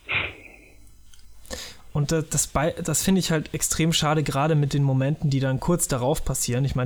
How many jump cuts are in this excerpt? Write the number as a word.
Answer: zero